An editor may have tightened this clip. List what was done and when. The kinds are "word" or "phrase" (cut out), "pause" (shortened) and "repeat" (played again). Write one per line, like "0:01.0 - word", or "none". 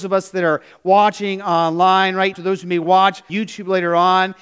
0:02.3 - word
0:03.3 - word